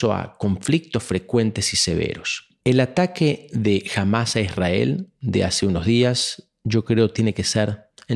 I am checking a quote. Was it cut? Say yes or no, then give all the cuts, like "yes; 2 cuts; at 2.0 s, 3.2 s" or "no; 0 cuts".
yes; 1 cut; at 2.6 s